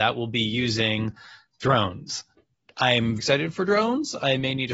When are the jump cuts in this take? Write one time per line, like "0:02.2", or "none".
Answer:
0:03.2